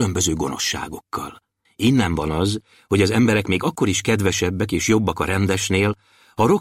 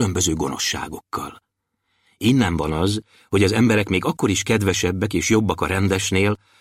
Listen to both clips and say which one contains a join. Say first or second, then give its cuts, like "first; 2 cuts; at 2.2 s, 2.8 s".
first; 1 cut; at 1.6 s